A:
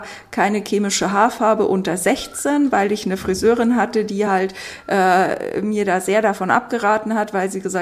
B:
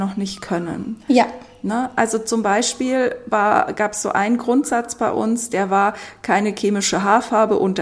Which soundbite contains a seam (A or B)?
B